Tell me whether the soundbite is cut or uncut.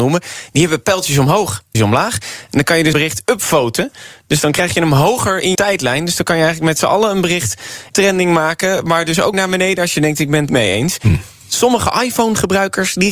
cut